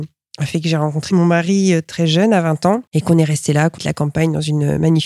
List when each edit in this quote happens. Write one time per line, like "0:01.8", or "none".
0:02.9
0:03.8